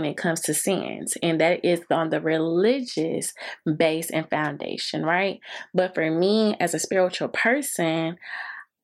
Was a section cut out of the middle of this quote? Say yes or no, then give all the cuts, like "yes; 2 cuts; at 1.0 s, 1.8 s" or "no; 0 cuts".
no; 0 cuts